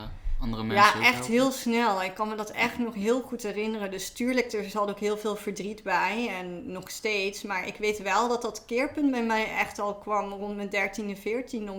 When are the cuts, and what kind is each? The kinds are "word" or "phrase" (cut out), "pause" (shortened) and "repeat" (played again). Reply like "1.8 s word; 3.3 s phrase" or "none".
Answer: none